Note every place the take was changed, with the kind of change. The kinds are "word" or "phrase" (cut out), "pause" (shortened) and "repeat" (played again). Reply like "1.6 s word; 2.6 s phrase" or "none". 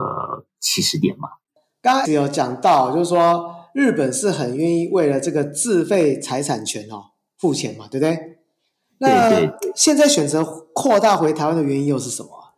2.0 s word